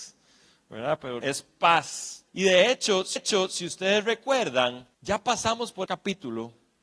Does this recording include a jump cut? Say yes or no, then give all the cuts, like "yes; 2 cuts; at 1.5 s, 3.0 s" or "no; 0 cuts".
yes; 5 cuts; at 1.2 s, 2.3 s, 3.2 s, 4.9 s, 5.8 s